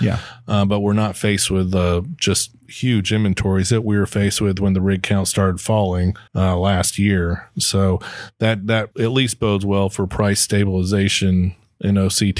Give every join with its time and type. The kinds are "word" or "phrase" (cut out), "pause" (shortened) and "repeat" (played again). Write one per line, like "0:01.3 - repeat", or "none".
0:06.3 - pause
0:08.9 - word